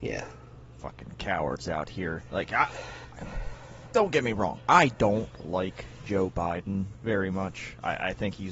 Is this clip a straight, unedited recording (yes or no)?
no